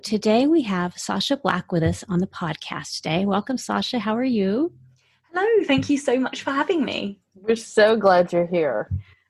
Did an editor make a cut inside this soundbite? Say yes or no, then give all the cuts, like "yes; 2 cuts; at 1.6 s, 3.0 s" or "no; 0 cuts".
no; 0 cuts